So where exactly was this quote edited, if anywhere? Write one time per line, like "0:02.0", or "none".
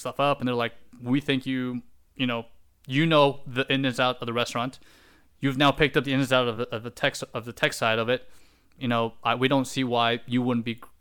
none